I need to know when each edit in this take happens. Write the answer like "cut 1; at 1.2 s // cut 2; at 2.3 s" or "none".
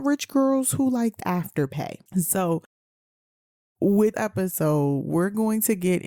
cut 1; at 1.2 s // cut 2; at 2.1 s // cut 3; at 4.1 s